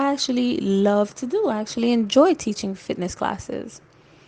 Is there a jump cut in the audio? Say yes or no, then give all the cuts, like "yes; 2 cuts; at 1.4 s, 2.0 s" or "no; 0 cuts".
no; 0 cuts